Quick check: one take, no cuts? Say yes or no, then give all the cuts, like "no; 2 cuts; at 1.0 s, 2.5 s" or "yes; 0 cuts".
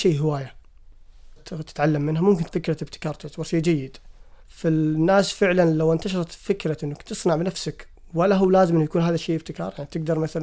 no; 3 cuts; at 1.4 s, 2.5 s, 4.4 s